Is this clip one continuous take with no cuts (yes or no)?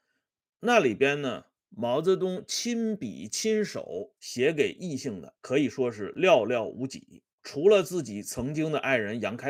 no